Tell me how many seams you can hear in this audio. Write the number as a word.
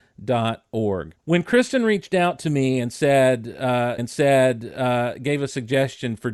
two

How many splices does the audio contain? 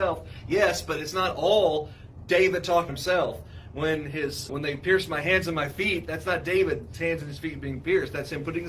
three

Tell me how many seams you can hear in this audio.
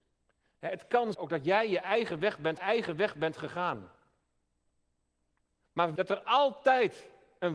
three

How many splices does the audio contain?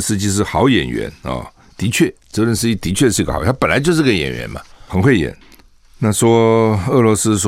one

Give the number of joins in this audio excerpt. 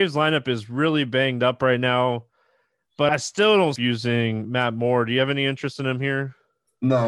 two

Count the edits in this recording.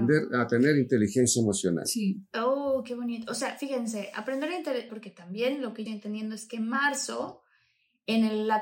two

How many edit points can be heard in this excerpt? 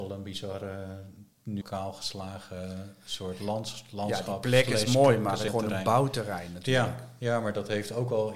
two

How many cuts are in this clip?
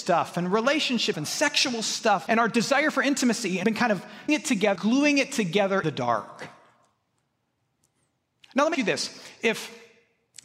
seven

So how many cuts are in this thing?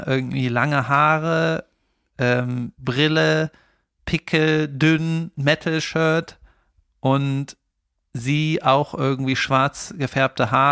zero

